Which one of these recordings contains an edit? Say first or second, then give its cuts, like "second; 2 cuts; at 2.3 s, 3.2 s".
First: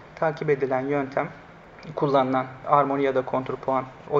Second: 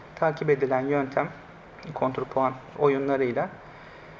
second; 1 cut; at 1.9 s